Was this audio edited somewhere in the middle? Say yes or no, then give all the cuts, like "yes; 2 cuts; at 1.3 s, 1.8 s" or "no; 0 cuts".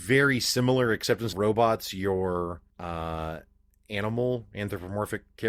yes; 2 cuts; at 1.3 s, 2.7 s